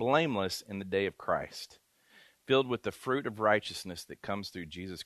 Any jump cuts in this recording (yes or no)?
no